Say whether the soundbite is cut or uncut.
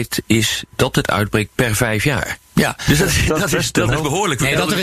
uncut